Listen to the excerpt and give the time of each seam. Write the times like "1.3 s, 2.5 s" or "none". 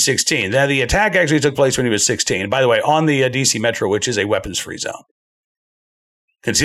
none